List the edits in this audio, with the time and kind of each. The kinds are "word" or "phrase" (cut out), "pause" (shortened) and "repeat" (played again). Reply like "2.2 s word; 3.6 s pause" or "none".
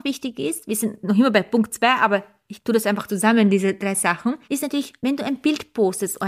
none